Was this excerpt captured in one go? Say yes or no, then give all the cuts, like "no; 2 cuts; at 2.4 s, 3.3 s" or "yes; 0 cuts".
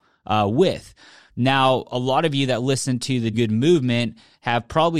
no; 1 cut; at 3.3 s